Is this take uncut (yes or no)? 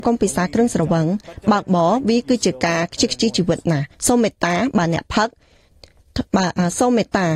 no